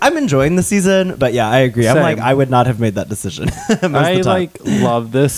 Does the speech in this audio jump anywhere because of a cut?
no; 0 cuts

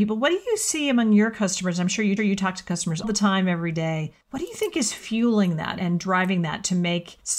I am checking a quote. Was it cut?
yes; 3 cuts; at 2.2 s, 3.0 s, 4.2 s

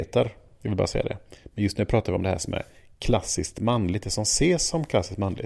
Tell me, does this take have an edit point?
no; 0 cuts

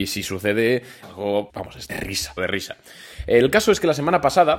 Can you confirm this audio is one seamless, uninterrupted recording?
no; 4 cuts; at 1.0 s, 1.5 s, 1.9 s, 2.4 s

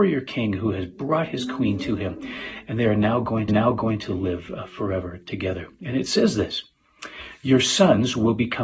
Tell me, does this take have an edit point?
yes; 1 cut; at 3.5 s

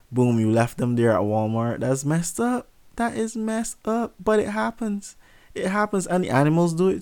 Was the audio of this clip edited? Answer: no; 0 cuts

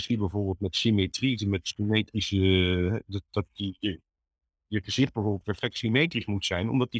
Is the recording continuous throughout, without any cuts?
yes; 0 cuts

